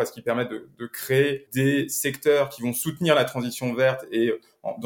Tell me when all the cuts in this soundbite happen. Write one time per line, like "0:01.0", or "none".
none